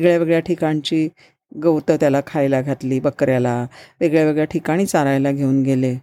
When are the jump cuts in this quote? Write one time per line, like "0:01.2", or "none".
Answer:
none

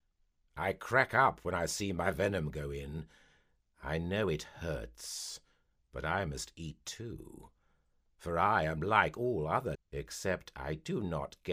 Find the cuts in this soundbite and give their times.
0:09.7

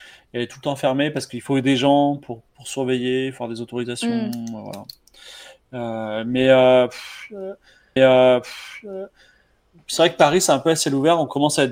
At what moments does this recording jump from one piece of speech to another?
0:08.0

